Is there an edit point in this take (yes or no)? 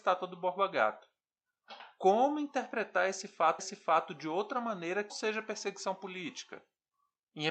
yes